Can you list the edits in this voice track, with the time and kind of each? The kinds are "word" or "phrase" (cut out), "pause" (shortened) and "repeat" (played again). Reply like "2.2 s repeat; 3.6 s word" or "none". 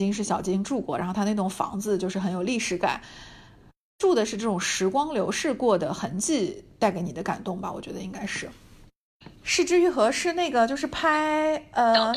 none